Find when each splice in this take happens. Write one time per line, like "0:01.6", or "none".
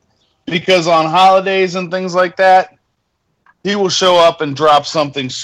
none